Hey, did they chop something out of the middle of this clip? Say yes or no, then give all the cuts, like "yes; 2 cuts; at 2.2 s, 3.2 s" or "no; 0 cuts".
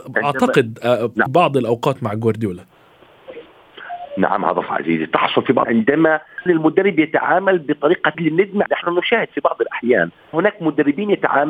yes; 7 cuts; at 1.3 s, 4.7 s, 5.6 s, 6.5 s, 8.1 s, 8.7 s, 10.3 s